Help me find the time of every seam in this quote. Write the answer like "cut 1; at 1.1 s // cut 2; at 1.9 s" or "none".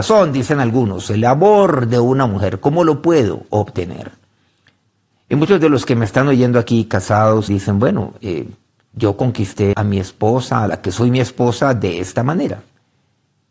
cut 1; at 7.5 s // cut 2; at 8.8 s // cut 3; at 9.7 s